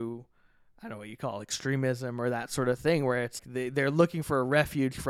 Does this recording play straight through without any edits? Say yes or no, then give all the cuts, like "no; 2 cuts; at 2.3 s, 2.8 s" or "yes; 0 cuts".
no; 1 cut; at 3.4 s